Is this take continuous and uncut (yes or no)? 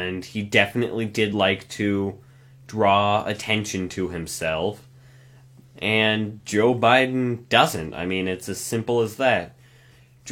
yes